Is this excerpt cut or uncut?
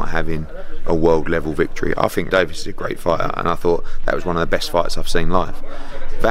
cut